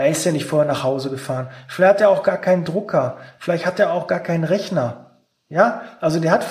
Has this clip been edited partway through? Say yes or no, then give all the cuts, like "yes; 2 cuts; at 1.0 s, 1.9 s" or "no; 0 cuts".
no; 0 cuts